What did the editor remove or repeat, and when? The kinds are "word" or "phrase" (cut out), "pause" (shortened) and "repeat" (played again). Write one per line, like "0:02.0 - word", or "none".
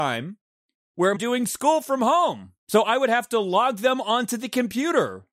0:01.2 - phrase
0:02.6 - pause